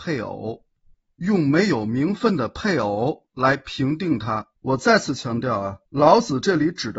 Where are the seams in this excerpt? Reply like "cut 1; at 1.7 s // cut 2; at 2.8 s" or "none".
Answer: cut 1; at 4.6 s // cut 2; at 5.9 s